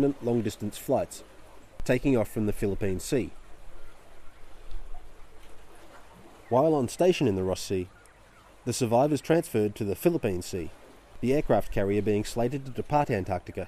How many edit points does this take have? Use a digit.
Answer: 0